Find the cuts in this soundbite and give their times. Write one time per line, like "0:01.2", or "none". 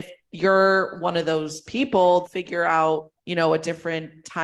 0:02.2
0:03.2

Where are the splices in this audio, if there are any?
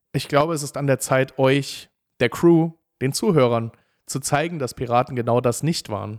none

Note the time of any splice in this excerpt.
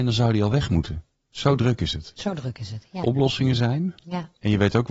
0:03.0

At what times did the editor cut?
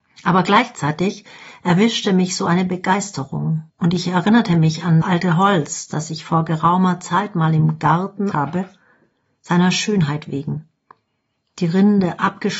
0:03.7
0:05.0
0:08.3

